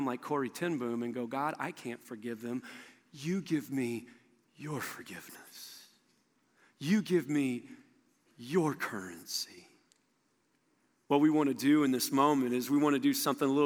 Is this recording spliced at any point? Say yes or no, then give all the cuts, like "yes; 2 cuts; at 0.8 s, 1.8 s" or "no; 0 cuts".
no; 0 cuts